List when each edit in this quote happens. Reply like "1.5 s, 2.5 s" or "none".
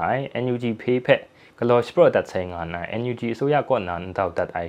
none